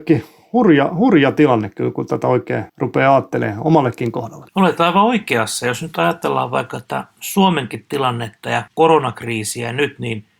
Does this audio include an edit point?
yes; 3 cuts; at 2.7 s, 4.5 s, 8.7 s

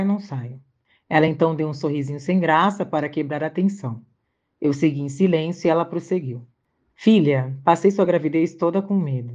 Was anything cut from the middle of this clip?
no; 0 cuts

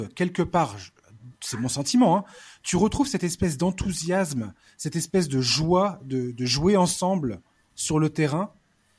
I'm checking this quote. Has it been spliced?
no; 0 cuts

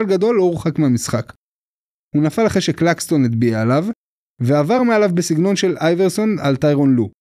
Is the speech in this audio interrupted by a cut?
no; 0 cuts

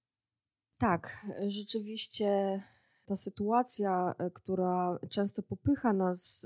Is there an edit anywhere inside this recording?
no; 0 cuts

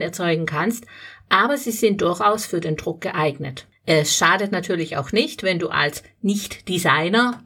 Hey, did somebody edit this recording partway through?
no; 0 cuts

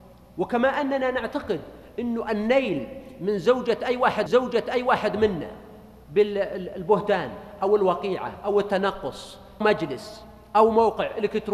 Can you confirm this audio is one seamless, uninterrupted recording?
no; 2 cuts; at 4.3 s, 9.6 s

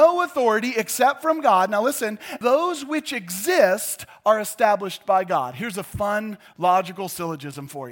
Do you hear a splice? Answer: yes; 1 cut; at 2.4 s

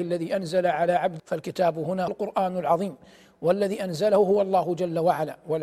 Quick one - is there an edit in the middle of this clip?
yes; 2 cuts; at 1.2 s, 2.1 s

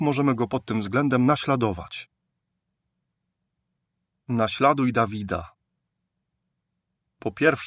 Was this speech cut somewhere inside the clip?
no; 0 cuts

